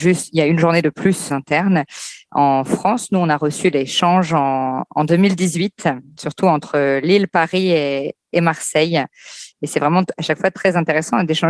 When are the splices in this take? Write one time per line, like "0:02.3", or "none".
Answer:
0:01.3